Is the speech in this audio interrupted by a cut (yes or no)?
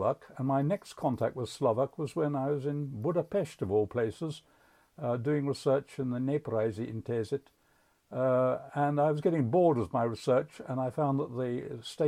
no